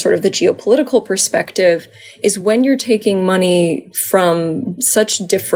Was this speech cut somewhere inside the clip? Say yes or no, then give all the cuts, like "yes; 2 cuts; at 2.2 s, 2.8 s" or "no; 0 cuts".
no; 0 cuts